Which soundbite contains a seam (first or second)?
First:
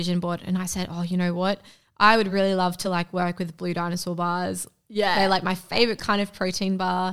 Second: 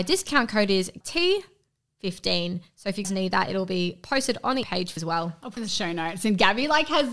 second